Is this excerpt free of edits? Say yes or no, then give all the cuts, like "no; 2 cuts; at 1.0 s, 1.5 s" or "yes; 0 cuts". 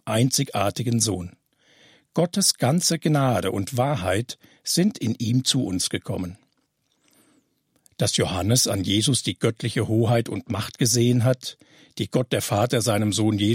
yes; 0 cuts